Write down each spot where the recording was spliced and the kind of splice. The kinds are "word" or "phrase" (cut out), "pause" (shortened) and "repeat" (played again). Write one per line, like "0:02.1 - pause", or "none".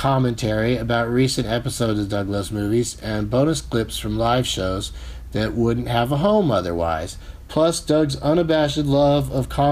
none